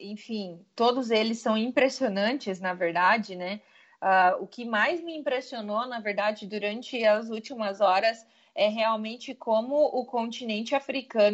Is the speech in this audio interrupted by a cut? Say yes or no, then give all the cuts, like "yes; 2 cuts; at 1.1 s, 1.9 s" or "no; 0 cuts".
no; 0 cuts